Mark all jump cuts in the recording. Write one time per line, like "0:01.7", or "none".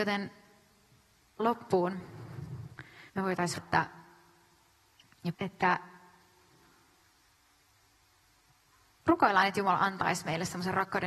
0:01.4
0:03.1
0:03.6
0:05.3